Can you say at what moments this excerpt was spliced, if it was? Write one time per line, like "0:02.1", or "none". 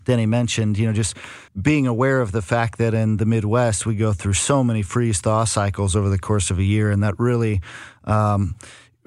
0:01.5